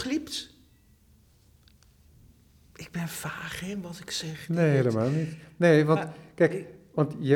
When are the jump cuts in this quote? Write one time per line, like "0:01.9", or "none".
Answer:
none